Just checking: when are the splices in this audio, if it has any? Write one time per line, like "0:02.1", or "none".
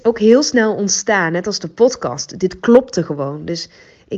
none

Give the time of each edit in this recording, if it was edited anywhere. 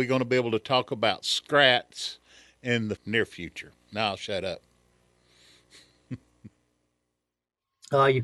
0:03.0

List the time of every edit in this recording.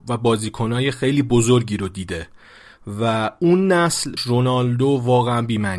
0:04.2

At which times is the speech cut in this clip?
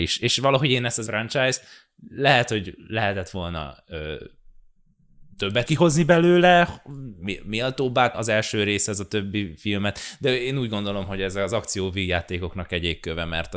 0:01.1
0:05.7
0:08.1

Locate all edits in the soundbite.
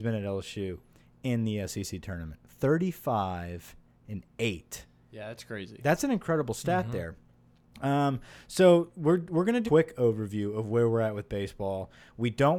0:09.7

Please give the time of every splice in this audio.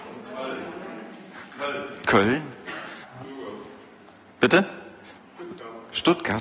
0:03.0

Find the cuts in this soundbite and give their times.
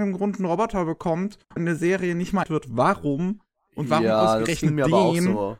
0:01.6
0:02.4

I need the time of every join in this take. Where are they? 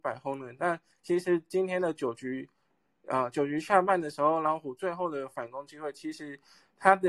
none

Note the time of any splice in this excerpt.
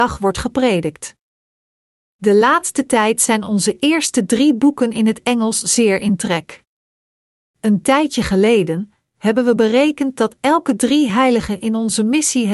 none

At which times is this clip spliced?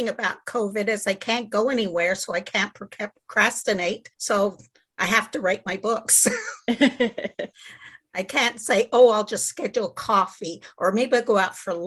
0:04.1

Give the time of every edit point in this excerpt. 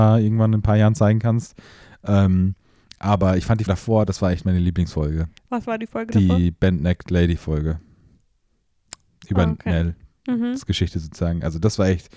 0:03.7
0:05.4

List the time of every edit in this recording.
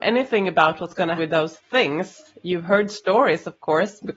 0:01.2

